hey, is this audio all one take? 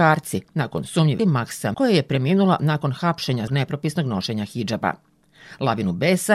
no; 3 cuts; at 1.2 s, 1.7 s, 3.5 s

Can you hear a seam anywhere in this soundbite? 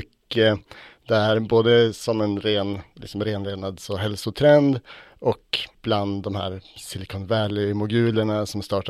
no; 0 cuts

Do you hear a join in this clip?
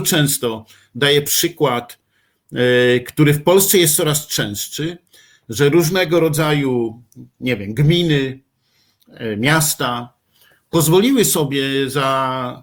no; 0 cuts

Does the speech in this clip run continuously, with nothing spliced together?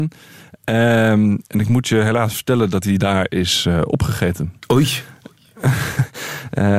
yes; 0 cuts

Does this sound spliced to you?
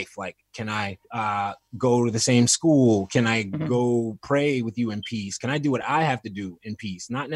yes; 1 cut; at 1.0 s

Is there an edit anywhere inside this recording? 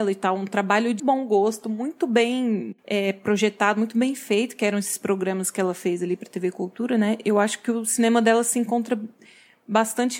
yes; 1 cut; at 1.0 s

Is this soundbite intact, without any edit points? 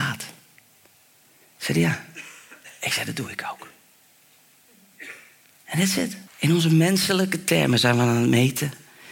no; 1 cut; at 6.3 s

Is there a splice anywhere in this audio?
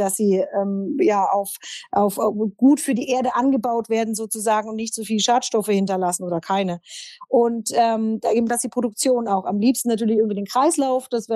no; 0 cuts

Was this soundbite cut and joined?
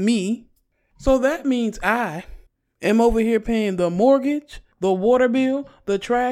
yes; 2 cuts; at 2.5 s, 4.7 s

